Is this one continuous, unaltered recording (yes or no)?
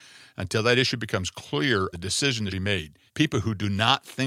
no